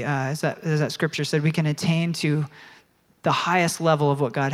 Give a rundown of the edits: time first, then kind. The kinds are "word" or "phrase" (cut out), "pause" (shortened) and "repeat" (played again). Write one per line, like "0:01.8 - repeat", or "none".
none